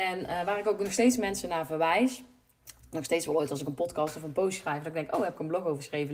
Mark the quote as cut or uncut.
uncut